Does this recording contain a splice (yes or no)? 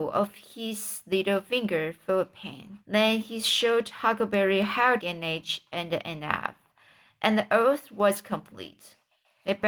yes